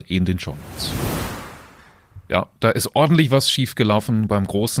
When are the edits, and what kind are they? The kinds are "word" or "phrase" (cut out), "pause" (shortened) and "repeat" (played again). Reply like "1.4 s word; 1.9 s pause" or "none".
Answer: none